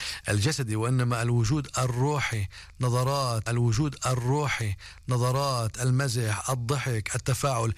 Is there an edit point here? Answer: yes; 1 cut; at 3.5 s

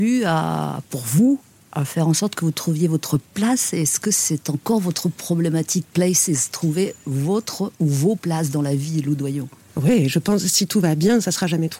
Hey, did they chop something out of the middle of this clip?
no; 0 cuts

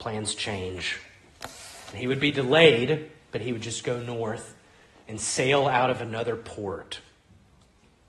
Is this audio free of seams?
yes; 0 cuts

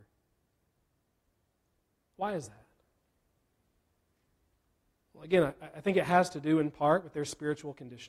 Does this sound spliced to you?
no; 0 cuts

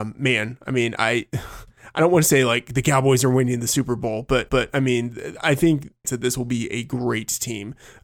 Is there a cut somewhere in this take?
yes; 2 cuts; at 4.5 s, 6.0 s

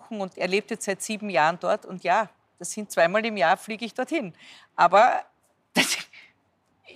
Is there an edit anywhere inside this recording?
no; 0 cuts

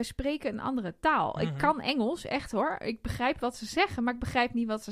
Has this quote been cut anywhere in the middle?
no; 0 cuts

